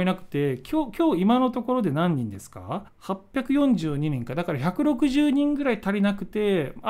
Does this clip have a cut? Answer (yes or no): yes